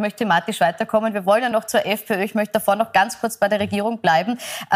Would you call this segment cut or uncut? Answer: uncut